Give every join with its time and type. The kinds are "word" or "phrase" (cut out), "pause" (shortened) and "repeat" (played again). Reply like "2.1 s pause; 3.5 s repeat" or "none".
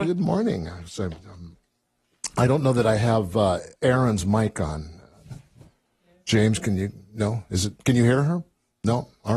3.7 s pause